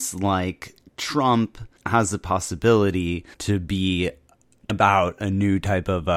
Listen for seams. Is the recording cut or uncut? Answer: cut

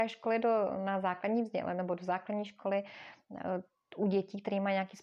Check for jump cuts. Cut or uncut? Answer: uncut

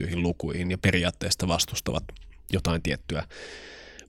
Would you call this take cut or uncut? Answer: uncut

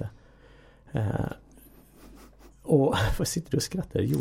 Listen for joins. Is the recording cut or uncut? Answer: uncut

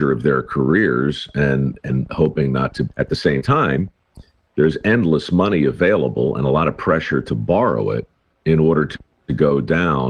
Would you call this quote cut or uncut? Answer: uncut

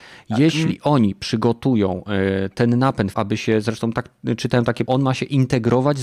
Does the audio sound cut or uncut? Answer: cut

